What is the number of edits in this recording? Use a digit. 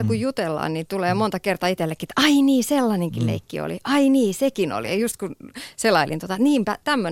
0